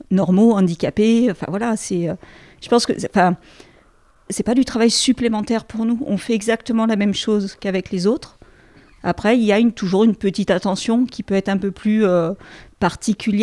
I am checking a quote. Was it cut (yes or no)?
no